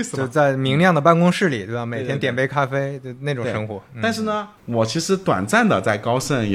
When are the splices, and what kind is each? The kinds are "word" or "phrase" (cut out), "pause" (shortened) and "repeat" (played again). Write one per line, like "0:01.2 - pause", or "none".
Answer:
0:04.6 - pause